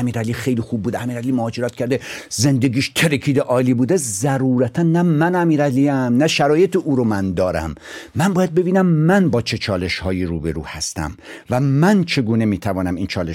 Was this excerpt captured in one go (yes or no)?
yes